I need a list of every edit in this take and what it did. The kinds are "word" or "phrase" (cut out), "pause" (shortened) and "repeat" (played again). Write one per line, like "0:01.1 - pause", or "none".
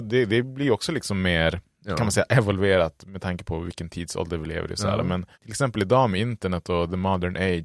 0:05.3 - pause